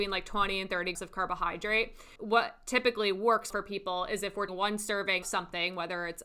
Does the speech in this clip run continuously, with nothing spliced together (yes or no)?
no